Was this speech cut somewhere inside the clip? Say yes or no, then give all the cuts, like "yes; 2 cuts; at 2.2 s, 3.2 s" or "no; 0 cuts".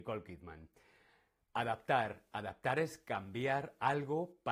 no; 0 cuts